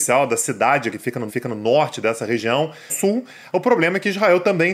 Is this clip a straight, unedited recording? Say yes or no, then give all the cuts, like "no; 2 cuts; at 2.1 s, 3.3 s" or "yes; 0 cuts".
no; 3 cuts; at 0.9 s, 1.3 s, 2.9 s